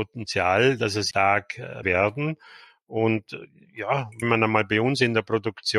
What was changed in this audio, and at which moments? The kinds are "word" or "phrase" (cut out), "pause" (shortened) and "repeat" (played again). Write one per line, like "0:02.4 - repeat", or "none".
0:01.1 - word
0:01.8 - word
0:04.2 - word

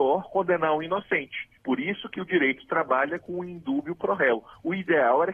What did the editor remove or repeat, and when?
0:01.6 - pause

